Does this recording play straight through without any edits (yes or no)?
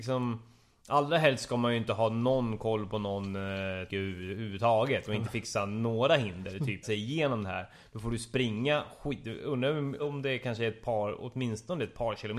no